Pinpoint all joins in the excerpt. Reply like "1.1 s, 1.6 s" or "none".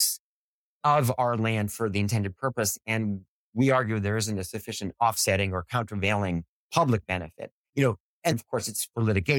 6.6 s, 8.3 s